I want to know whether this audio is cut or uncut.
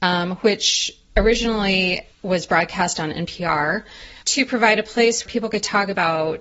cut